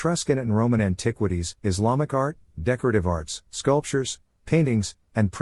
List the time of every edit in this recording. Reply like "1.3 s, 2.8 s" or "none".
1.6 s, 3.5 s

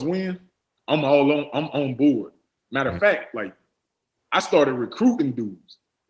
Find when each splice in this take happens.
none

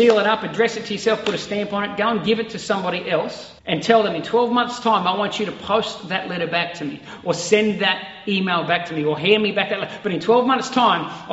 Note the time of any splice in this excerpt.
3.6 s

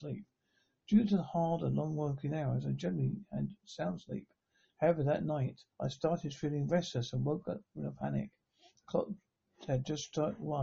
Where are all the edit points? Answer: 5.7 s

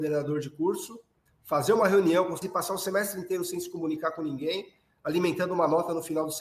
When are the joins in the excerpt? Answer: 1.3 s, 2.4 s

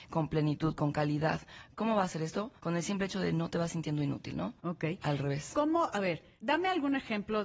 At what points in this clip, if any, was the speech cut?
2.6 s, 4.6 s, 6.4 s

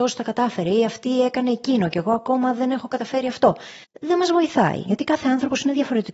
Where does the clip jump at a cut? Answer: 3.8 s

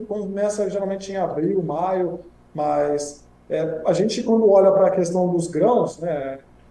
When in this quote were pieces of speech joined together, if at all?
none

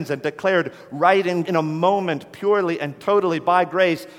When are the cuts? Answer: 1.4 s

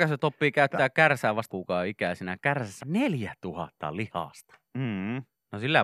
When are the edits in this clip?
1.5 s, 2.8 s

